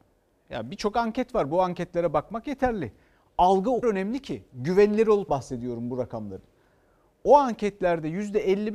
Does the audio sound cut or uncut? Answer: cut